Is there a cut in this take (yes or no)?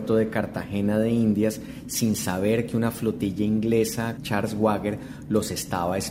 yes